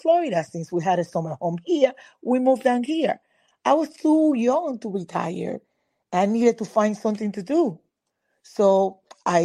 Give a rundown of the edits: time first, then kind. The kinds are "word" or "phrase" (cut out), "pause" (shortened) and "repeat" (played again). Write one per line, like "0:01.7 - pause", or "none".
none